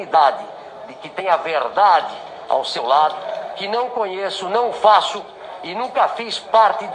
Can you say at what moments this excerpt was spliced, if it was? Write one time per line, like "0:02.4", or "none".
none